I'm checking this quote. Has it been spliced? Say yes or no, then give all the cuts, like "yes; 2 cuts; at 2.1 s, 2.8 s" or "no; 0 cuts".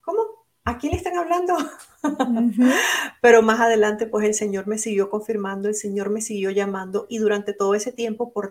no; 0 cuts